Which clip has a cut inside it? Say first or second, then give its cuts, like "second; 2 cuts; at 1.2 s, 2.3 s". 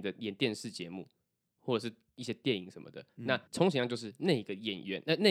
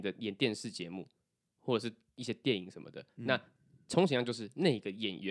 first; 1 cut; at 3.5 s